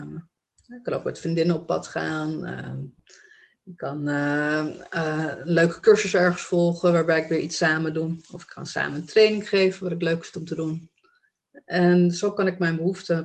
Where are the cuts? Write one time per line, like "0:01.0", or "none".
none